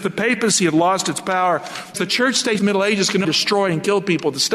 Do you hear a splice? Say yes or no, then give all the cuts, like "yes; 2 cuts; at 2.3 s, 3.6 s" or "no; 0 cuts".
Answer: yes; 3 cuts; at 1.9 s, 2.6 s, 3.2 s